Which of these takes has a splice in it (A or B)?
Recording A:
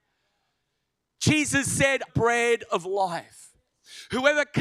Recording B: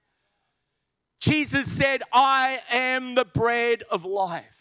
A